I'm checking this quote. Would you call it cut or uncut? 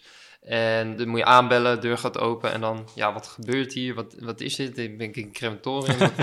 uncut